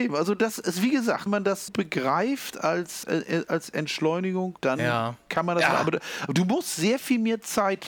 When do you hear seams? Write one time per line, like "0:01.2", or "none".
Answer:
0:01.3
0:01.7
0:03.0
0:04.6